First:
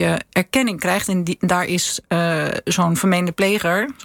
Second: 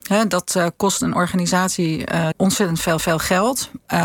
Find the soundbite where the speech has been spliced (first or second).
second